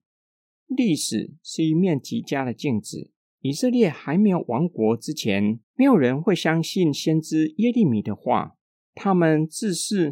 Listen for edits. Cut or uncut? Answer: cut